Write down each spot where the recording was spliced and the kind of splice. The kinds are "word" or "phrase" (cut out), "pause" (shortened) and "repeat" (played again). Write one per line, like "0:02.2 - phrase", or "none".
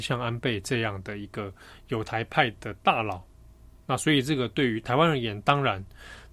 none